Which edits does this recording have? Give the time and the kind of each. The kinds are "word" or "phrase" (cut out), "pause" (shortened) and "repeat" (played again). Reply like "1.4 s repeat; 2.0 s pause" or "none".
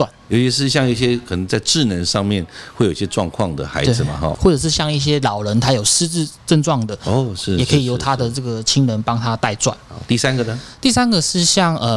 4.3 s word